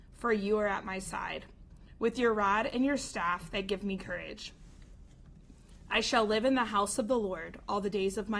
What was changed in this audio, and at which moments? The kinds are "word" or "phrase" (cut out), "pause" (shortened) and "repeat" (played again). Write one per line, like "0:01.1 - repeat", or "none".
none